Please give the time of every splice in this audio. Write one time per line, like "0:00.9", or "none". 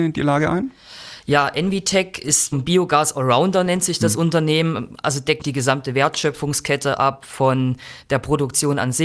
0:02.5
0:05.4